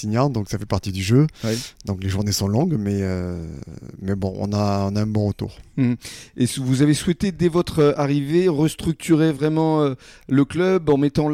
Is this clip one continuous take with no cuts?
yes; 0 cuts

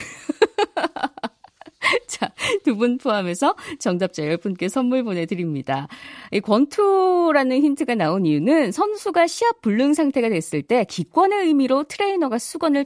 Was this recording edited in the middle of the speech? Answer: no; 0 cuts

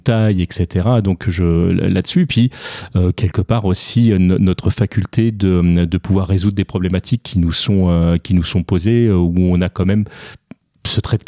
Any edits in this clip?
no; 0 cuts

